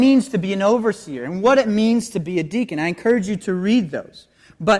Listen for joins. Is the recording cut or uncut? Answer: uncut